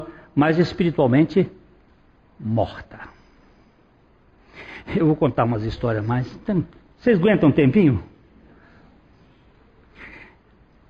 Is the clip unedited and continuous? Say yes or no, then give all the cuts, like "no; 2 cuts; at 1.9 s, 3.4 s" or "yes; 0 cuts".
yes; 0 cuts